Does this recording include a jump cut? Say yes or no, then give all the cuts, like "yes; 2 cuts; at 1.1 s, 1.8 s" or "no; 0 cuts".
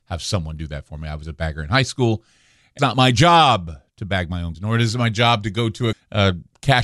yes; 3 cuts; at 2.8 s, 4.5 s, 5.9 s